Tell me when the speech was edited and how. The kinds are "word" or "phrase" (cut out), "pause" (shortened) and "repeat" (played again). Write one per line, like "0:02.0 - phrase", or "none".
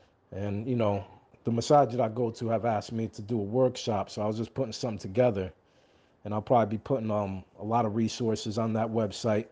none